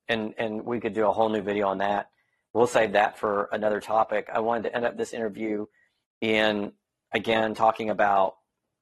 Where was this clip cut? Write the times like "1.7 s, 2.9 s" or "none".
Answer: none